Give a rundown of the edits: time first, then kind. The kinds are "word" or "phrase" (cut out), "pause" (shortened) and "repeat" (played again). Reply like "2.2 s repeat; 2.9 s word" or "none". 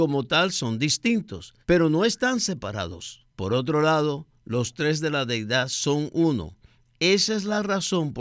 1.6 s pause; 3.3 s pause